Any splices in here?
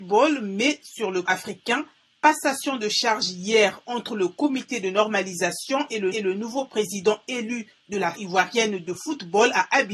yes; 3 cuts; at 1.3 s, 6.1 s, 8.2 s

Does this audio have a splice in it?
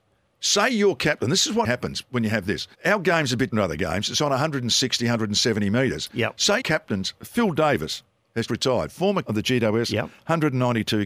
yes; 6 cuts; at 1.6 s, 2.7 s, 3.5 s, 6.6 s, 8.5 s, 9.2 s

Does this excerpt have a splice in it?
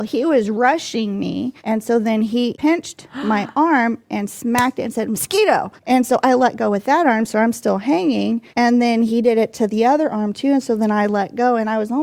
yes; 3 cuts; at 1.6 s, 5.8 s, 8.5 s

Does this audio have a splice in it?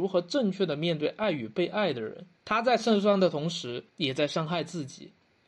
yes; 2 cuts; at 2.4 s, 3.9 s

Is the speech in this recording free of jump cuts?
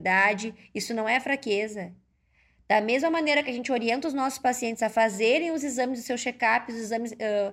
yes; 0 cuts

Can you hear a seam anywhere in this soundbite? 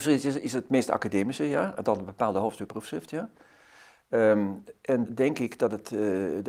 yes; 2 cuts; at 2.7 s, 5.1 s

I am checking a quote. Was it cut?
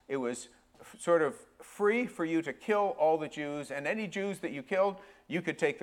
no; 0 cuts

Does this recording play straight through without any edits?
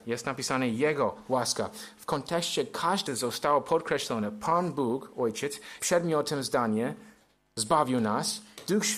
no; 2 cuts; at 3.1 s, 5.8 s

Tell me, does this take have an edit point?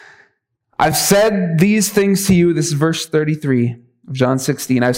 no; 0 cuts

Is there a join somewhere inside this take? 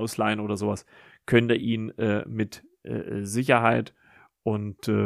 no; 0 cuts

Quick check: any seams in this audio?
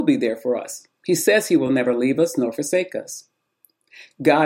no; 0 cuts

